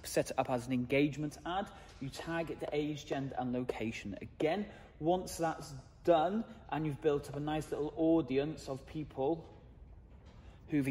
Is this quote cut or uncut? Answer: uncut